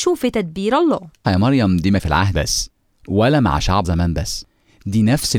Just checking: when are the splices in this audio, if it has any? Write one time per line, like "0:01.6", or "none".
0:01.2
0:02.0
0:02.3
0:03.8